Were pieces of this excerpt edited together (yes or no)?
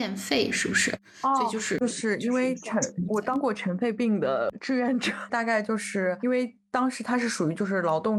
yes